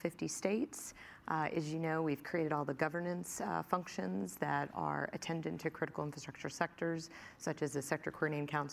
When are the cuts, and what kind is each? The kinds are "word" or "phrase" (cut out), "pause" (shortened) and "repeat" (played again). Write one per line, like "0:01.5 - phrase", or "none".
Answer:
none